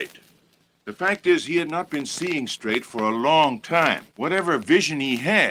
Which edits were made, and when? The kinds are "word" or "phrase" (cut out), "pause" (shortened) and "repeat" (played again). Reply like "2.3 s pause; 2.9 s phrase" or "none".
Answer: 4.1 s pause